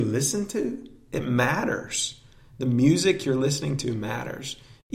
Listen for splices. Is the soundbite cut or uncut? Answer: uncut